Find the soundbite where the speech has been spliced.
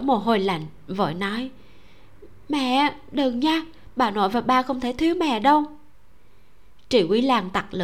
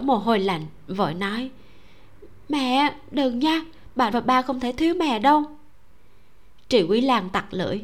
second; 1 cut; at 4.1 s

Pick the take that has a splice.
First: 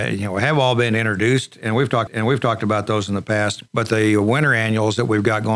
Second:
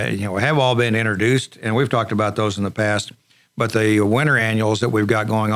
first; 2 cuts; at 2.1 s, 3.7 s

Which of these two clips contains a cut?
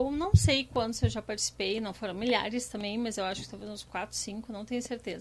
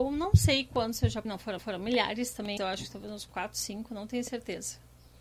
second; 3 cuts; at 1.2 s, 1.6 s, 2.6 s

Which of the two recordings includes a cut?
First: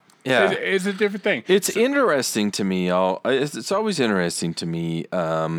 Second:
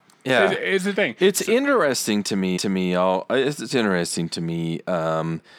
second; 3 cuts; at 0.9 s, 2.6 s, 3.7 s

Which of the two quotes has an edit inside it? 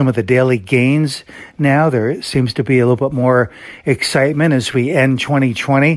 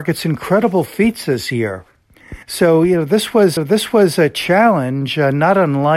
second; 2 cuts; at 2.4 s, 3.6 s

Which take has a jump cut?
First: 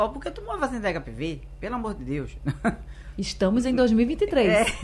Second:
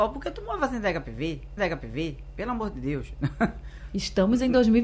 second; 1 cut; at 1.6 s

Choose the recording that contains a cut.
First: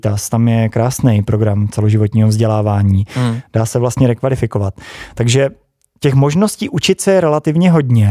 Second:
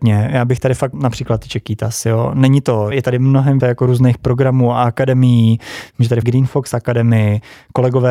second; 4 cuts; at 0.9 s, 2.9 s, 3.6 s, 6.2 s

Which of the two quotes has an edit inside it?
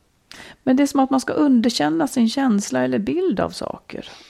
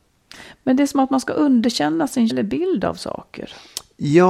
second; 1 cut; at 2.3 s

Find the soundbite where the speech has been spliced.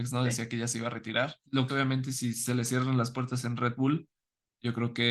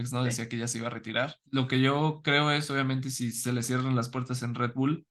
first; 1 cut; at 1.7 s

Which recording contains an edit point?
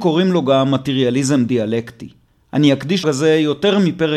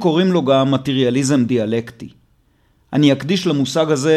first; 2 cuts; at 2.3 s, 3.0 s

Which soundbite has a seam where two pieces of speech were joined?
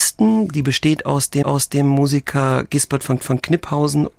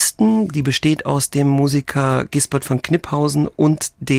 first; 2 cuts; at 1.4 s, 3.2 s

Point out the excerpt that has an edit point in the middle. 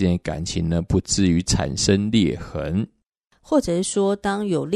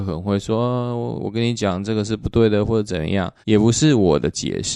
second; 1 cut; at 3.4 s

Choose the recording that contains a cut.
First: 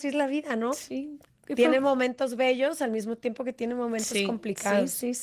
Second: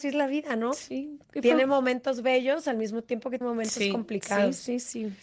second; 2 cuts; at 1.2 s, 3.4 s

